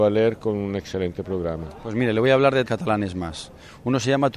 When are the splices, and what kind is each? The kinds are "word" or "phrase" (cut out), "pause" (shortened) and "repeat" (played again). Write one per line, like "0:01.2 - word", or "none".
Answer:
0:02.7 - word